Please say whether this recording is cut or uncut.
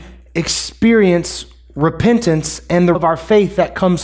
cut